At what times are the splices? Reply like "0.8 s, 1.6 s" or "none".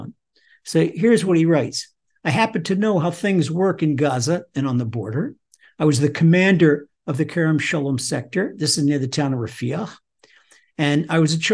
none